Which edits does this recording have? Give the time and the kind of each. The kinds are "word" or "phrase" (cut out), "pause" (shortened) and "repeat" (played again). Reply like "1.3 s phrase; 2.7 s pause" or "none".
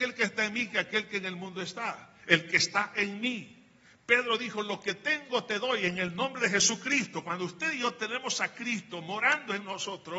none